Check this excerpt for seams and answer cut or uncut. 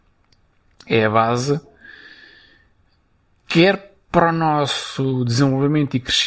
uncut